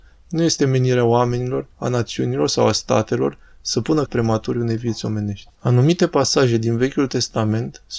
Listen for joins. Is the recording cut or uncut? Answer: cut